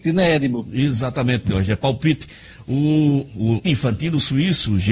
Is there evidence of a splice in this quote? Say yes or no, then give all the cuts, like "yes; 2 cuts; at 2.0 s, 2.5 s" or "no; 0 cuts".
yes; 1 cut; at 3.6 s